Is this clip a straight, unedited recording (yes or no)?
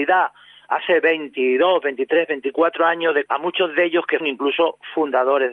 no